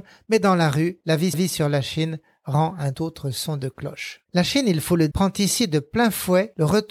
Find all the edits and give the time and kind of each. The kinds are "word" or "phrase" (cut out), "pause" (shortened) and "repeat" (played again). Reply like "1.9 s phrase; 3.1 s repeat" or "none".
1.3 s repeat; 2.9 s word; 4.3 s pause; 5.1 s word